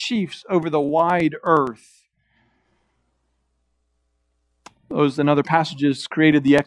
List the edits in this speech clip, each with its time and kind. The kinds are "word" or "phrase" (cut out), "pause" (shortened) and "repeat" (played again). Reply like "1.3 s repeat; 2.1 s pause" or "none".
none